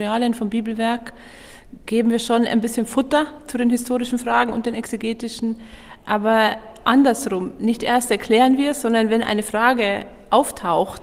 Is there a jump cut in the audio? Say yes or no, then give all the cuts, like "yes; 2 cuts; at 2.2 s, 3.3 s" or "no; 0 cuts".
no; 0 cuts